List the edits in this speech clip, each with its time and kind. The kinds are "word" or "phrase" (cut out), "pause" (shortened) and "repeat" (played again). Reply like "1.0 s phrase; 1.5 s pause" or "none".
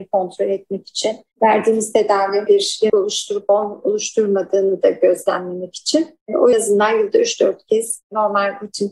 2.5 s phrase; 2.9 s word; 6.5 s phrase